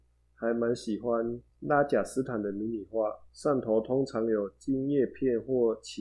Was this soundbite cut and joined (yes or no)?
yes